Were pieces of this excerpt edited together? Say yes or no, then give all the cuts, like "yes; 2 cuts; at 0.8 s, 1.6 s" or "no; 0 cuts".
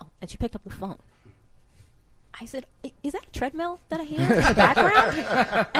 no; 0 cuts